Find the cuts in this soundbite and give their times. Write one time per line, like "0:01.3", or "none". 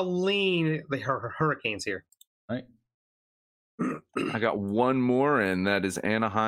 none